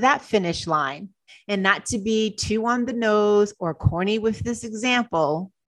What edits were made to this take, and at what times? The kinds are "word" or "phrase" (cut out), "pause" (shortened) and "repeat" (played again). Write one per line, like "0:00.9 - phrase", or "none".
0:01.3 - pause